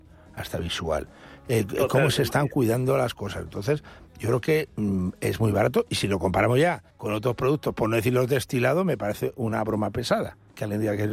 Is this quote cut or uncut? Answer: cut